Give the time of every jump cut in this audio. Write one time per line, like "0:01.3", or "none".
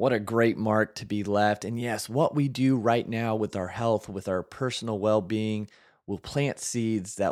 none